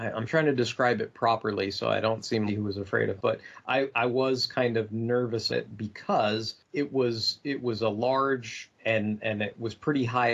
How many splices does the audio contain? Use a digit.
5